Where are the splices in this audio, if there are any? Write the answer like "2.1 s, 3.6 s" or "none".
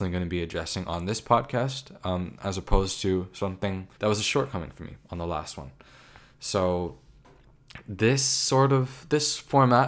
3.9 s